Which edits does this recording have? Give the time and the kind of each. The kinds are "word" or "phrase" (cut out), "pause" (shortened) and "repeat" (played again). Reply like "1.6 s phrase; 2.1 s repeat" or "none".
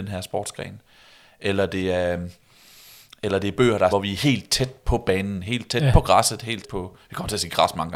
3.9 s word; 6.6 s word